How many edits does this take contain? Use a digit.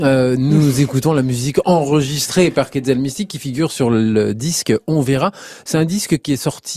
0